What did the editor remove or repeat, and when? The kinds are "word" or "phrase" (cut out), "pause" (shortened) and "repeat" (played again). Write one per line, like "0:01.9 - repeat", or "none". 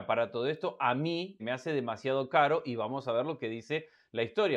0:01.4 - word